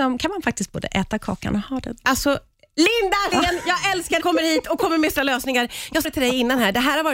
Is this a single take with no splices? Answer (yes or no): no